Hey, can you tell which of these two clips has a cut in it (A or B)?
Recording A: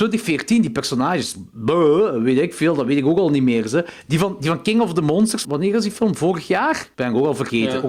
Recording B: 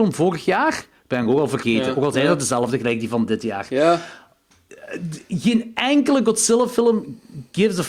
A